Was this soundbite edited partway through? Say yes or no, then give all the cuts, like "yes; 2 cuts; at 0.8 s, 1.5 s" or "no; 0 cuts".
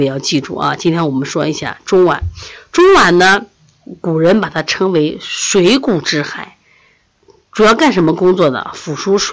no; 0 cuts